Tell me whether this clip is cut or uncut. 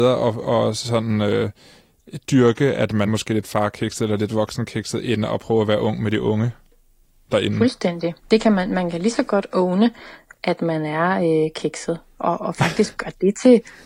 cut